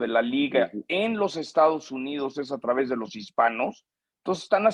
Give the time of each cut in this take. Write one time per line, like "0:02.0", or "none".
none